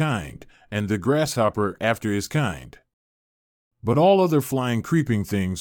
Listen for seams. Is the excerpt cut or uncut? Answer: uncut